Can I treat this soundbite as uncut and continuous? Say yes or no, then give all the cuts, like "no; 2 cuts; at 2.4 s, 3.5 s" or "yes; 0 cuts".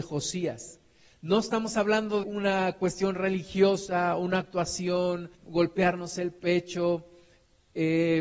no; 2 cuts; at 2.2 s, 5.3 s